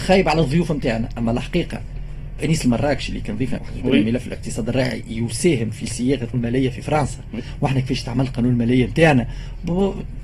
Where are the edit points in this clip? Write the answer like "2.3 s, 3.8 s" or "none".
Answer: 2.4 s, 3.6 s, 6.3 s

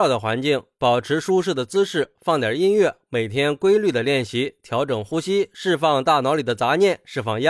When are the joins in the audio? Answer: none

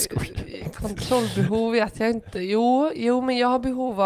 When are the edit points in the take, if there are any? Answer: none

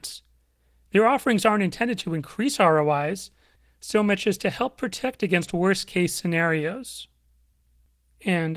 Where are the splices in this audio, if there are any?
none

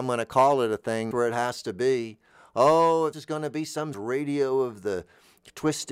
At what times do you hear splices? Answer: 1.1 s, 3.1 s, 3.9 s

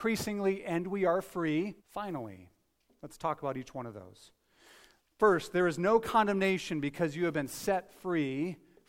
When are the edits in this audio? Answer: 1.8 s

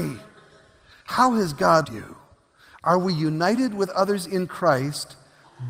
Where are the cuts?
1.8 s

